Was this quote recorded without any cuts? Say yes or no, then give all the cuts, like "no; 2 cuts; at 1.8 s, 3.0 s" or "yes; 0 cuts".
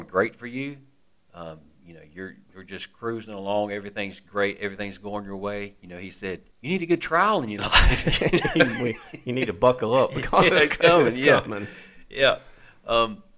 no; 2 cuts; at 2.4 s, 6.5 s